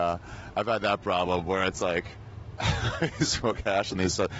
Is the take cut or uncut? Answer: uncut